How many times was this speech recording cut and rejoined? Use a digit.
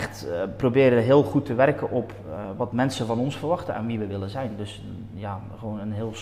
0